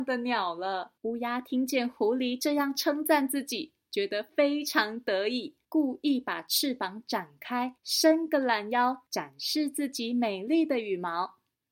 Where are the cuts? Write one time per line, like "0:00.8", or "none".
0:01.0
0:05.6
0:07.8
0:09.1